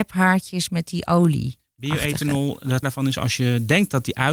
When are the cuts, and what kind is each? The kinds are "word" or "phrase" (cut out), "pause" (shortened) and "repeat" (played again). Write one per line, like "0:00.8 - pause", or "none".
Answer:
0:02.8 - word